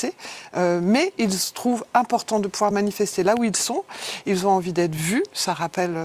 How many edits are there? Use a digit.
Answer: 0